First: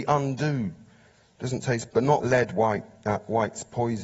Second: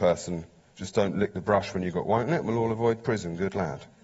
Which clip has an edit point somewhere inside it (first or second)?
first